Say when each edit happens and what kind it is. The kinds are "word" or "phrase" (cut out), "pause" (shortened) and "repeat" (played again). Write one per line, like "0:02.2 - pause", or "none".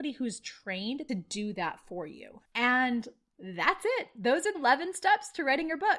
0:01.1 - phrase
0:04.5 - word